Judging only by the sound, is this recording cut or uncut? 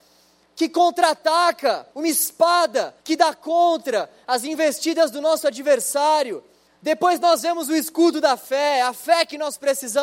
cut